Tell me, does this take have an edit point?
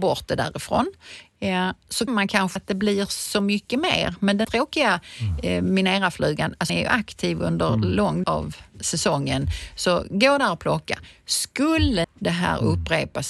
yes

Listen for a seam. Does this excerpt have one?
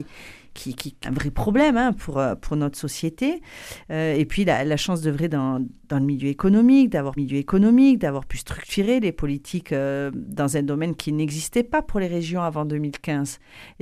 yes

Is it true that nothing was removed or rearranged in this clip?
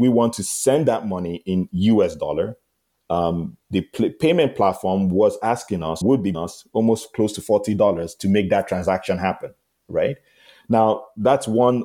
no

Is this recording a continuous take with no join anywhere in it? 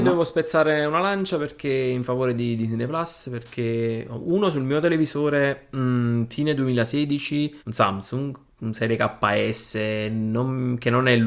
no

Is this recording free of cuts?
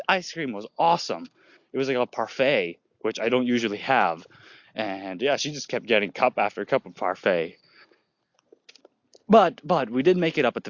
yes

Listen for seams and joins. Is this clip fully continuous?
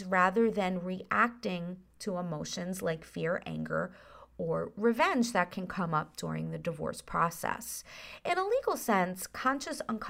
yes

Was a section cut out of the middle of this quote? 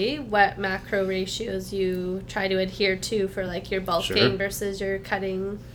no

